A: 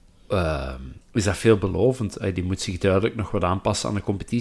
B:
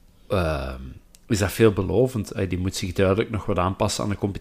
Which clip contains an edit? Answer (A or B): A